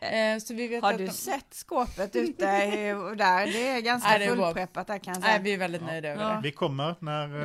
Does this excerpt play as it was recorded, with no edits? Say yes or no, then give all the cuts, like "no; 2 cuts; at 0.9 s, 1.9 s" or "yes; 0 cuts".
yes; 0 cuts